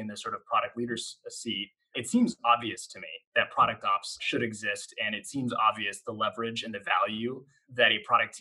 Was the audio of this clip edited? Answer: no; 0 cuts

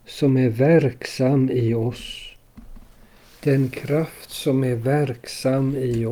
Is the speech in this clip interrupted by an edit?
no; 0 cuts

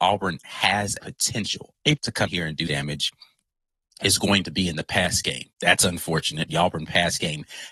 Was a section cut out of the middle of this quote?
yes; 6 cuts; at 1.0 s, 2.0 s, 2.3 s, 2.7 s, 5.5 s, 6.5 s

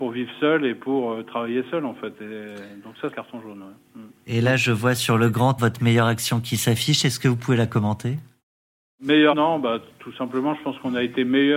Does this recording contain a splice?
yes; 3 cuts; at 3.1 s, 5.6 s, 9.3 s

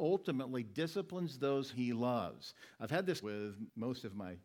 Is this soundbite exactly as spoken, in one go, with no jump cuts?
no; 2 cuts; at 1.7 s, 3.2 s

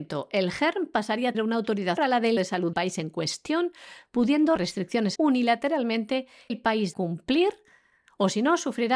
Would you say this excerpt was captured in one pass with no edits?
no; 8 cuts; at 1.3 s, 2.0 s, 2.4 s, 2.7 s, 4.6 s, 5.2 s, 6.5 s, 6.9 s

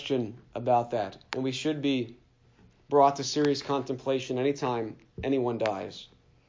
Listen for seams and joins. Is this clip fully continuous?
yes; 0 cuts

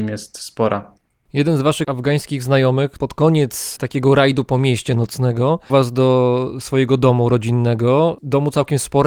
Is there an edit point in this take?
yes; 1 cut; at 5.7 s

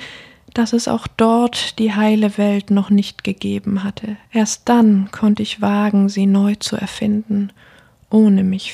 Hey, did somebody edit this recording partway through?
yes; 1 cut; at 4.3 s

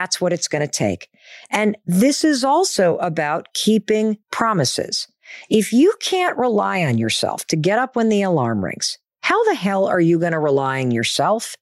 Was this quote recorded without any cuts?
no; 1 cut; at 4.2 s

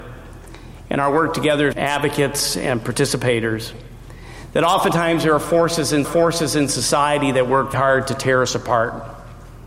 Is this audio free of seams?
no; 3 cuts; at 1.7 s, 6.0 s, 7.7 s

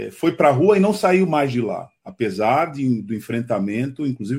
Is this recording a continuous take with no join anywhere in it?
no; 1 cut; at 2.0 s

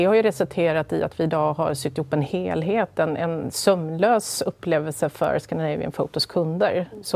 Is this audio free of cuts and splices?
yes; 0 cuts

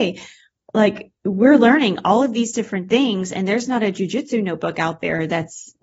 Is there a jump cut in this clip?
no; 0 cuts

